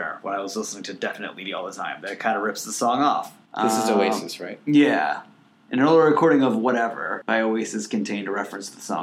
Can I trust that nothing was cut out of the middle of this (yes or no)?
no